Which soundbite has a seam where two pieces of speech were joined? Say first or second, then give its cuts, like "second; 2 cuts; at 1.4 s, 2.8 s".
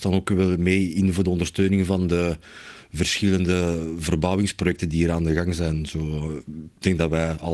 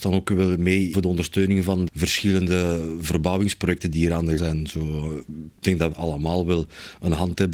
second; 4 cuts; at 0.9 s, 1.9 s, 4.4 s, 5.9 s